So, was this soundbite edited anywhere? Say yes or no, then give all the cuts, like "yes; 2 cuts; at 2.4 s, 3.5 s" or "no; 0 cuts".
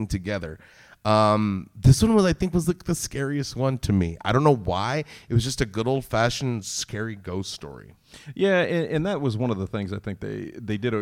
no; 0 cuts